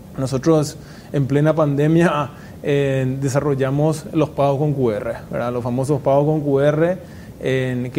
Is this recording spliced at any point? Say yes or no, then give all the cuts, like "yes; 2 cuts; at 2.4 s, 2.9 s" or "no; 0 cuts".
no; 0 cuts